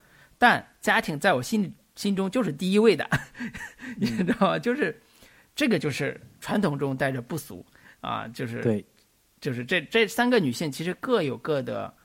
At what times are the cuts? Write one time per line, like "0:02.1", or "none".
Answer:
none